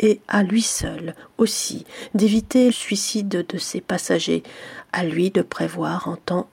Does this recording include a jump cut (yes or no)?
yes